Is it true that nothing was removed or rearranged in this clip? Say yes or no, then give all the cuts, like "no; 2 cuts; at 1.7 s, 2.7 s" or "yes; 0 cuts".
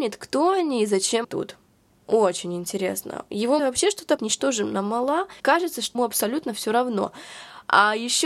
no; 5 cuts; at 1.2 s, 3.6 s, 4.2 s, 5.4 s, 5.9 s